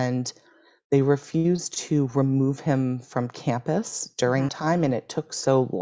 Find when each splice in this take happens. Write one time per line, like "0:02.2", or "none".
0:04.5

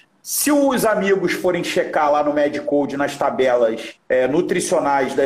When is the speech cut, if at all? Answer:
0:04.0

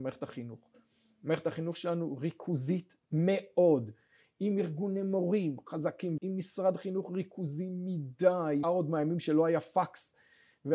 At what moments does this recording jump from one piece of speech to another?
0:06.2
0:08.6

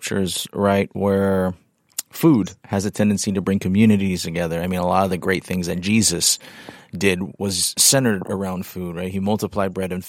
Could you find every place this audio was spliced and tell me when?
0:02.6

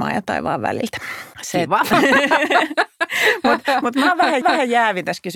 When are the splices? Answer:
0:01.3
0:04.4

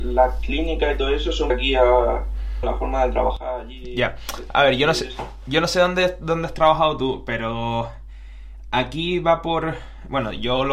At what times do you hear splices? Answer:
0:01.5
0:02.6

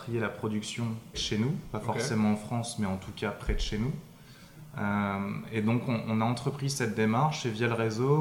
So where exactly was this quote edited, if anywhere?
0:01.1

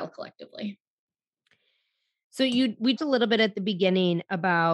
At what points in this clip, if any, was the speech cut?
0:03.0

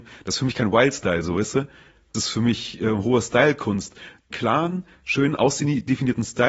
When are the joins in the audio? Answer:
0:02.1
0:04.3

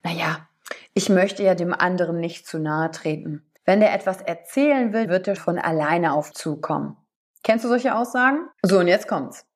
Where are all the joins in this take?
0:03.6
0:05.0
0:05.4
0:06.3
0:08.5

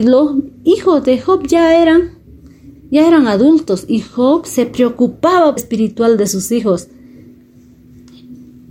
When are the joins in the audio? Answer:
0:05.6

